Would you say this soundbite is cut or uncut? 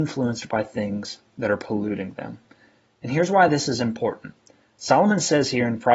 uncut